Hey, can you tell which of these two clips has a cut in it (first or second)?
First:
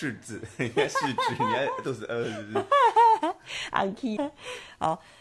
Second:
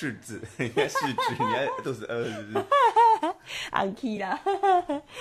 first